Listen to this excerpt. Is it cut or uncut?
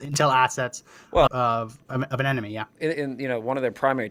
cut